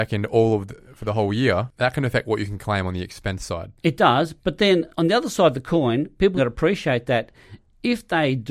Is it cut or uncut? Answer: cut